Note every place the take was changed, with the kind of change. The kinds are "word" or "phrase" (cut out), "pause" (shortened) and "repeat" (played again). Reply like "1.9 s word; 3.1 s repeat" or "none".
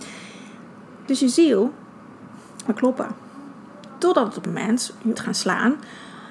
2.7 s word; 4.5 s word; 5.1 s phrase